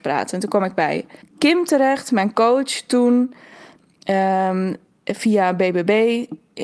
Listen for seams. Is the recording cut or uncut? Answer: cut